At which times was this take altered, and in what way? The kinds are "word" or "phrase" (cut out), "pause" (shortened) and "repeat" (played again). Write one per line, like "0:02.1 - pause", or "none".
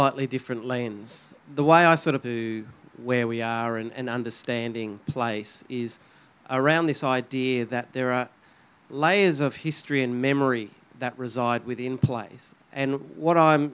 0:01.4 - pause
0:02.2 - phrase